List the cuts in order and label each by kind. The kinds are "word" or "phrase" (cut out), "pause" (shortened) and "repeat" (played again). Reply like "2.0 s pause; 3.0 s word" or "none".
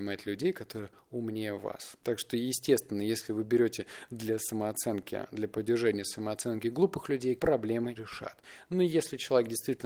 2.0 s pause; 7.4 s phrase; 8.0 s word